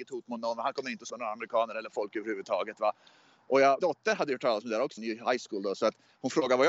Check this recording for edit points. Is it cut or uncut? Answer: cut